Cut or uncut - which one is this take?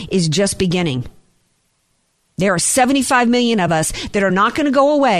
uncut